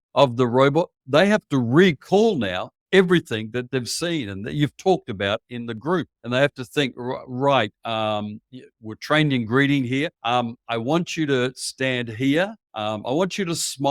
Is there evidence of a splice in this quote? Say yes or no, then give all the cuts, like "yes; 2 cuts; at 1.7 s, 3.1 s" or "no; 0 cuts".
yes; 4 cuts; at 1.0 s, 6.1 s, 10.1 s, 12.6 s